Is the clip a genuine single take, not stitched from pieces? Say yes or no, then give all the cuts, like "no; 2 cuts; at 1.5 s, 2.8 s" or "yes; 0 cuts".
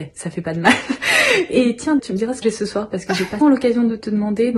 no; 3 cuts; at 2.0 s, 2.4 s, 3.4 s